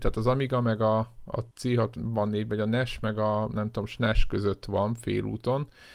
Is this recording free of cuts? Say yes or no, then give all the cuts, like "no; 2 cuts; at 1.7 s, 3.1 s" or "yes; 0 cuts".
no; 1 cut; at 1.5 s